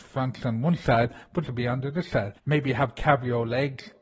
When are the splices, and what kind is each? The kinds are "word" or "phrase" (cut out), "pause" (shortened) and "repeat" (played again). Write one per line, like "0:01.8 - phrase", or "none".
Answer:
0:01.4 - phrase
0:02.4 - pause